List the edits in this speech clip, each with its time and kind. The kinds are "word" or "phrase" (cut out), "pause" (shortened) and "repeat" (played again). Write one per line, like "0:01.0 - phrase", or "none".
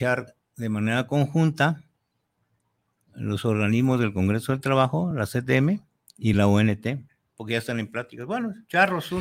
none